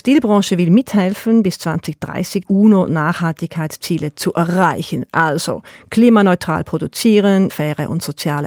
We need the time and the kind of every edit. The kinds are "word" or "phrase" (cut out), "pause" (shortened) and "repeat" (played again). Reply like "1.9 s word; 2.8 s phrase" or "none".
2.4 s word; 7.5 s word